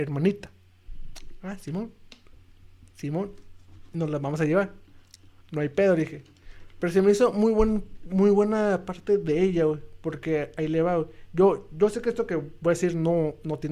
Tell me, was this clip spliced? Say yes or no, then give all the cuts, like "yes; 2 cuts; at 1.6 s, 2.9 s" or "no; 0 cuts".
no; 0 cuts